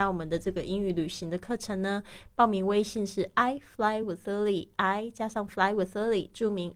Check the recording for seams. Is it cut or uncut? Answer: uncut